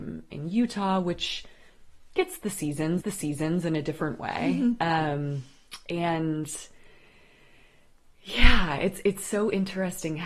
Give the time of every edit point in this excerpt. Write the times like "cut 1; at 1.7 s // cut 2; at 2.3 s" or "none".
cut 1; at 3.0 s